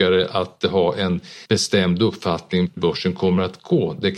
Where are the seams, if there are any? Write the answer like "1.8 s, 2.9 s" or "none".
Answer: 1.5 s, 2.8 s

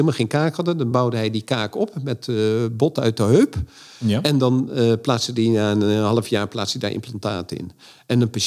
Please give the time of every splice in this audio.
none

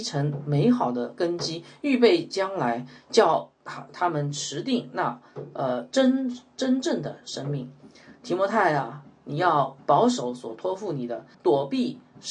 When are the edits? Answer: 11.3 s

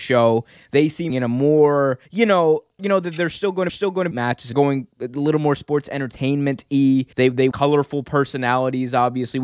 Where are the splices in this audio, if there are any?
1.1 s, 2.1 s, 2.8 s, 3.7 s, 4.1 s, 4.5 s, 7.1 s, 7.5 s

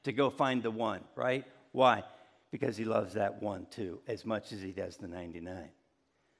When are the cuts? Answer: none

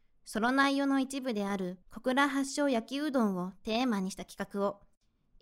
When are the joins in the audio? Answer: 1.8 s

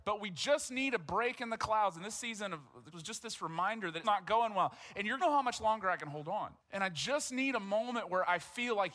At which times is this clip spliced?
2.9 s, 4.0 s, 5.2 s, 6.6 s

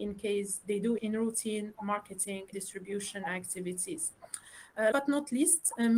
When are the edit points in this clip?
1.0 s, 2.5 s, 4.9 s

